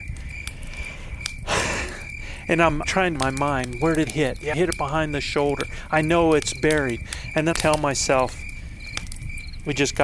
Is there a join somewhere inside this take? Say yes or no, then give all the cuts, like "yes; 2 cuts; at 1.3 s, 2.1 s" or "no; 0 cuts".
yes; 5 cuts; at 2.8 s, 3.2 s, 4.1 s, 4.5 s, 7.5 s